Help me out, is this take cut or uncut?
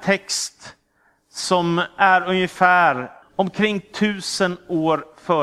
cut